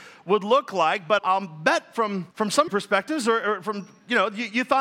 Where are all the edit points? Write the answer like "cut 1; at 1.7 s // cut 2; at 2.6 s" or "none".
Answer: cut 1; at 1.2 s // cut 2; at 2.3 s // cut 3; at 2.7 s